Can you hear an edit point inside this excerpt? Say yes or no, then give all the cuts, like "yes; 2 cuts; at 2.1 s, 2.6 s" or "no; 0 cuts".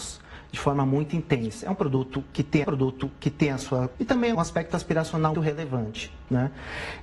yes; 4 cuts; at 2.6 s, 3.9 s, 4.3 s, 5.3 s